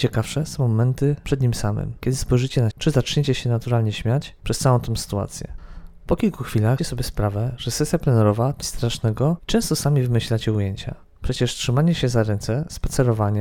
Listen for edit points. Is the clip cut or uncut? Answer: cut